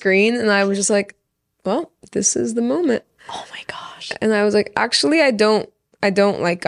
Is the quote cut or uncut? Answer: uncut